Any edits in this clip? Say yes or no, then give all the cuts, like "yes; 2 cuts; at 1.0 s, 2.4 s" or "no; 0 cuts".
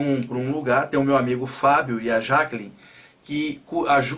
no; 0 cuts